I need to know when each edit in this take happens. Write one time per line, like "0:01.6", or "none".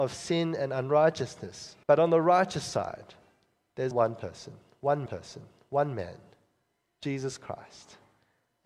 0:01.8
0:03.9
0:05.1